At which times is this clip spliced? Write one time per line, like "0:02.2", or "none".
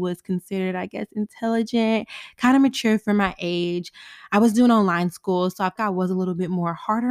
0:05.8